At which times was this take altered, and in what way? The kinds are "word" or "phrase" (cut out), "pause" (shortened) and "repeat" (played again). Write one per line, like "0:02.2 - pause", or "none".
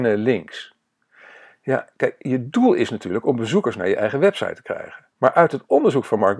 0:05.1 - pause